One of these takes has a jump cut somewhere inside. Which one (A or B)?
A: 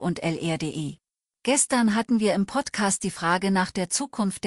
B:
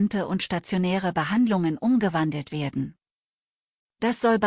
A